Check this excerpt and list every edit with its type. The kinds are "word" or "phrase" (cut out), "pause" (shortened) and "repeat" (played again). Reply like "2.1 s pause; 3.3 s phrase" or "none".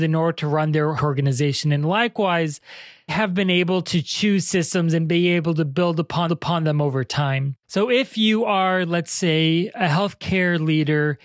1.0 s word; 3.1 s word; 6.3 s repeat; 7.6 s pause